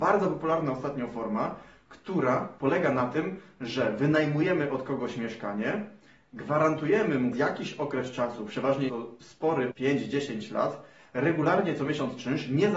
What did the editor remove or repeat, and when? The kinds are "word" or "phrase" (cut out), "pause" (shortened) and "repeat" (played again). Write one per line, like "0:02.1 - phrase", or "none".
0:07.3 - word
0:08.9 - word
0:09.7 - word